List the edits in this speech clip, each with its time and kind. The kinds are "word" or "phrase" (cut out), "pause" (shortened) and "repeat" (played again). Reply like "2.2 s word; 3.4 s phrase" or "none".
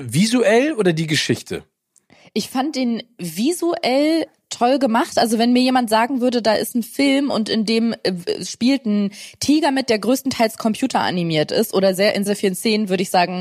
12.3 s word